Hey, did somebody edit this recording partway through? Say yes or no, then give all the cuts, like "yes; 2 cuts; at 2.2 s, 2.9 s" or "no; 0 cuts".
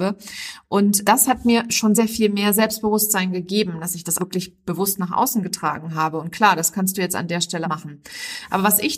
yes; 4 cuts; at 1.0 s, 1.9 s, 4.2 s, 7.6 s